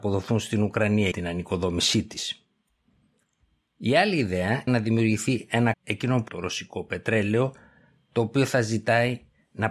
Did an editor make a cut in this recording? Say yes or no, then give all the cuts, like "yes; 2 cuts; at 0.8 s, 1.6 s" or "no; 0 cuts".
yes; 4 cuts; at 1.1 s, 4.7 s, 5.7 s, 6.3 s